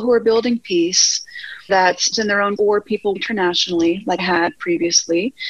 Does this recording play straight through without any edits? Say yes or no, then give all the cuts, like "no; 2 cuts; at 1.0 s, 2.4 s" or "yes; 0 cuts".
no; 5 cuts; at 1.7 s, 2.1 s, 2.6 s, 3.2 s, 4.2 s